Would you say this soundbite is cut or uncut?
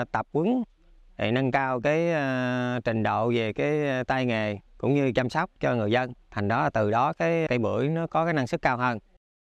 cut